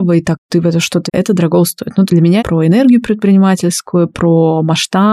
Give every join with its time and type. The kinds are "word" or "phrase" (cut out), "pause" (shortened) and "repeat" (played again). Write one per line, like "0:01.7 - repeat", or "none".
0:01.1 - word
0:02.1 - word
0:02.4 - word